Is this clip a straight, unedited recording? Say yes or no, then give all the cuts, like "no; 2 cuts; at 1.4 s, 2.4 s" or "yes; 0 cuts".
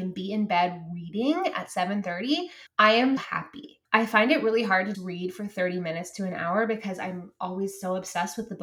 no; 4 cuts; at 2.7 s, 3.2 s, 3.8 s, 4.9 s